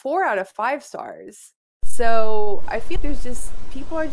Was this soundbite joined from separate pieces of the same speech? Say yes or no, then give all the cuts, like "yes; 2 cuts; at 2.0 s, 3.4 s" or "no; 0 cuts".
yes; 1 cut; at 3.0 s